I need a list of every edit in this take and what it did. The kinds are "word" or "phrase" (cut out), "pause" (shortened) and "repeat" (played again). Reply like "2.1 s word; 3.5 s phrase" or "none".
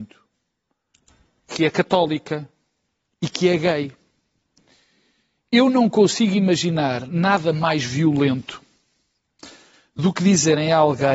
none